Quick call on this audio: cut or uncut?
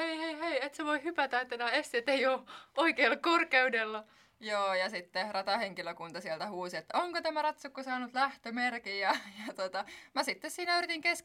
uncut